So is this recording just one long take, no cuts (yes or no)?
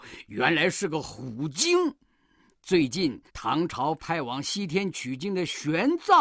no